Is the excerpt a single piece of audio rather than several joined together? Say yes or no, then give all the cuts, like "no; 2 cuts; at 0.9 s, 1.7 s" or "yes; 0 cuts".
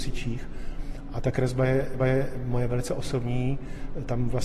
no; 1 cut; at 2.0 s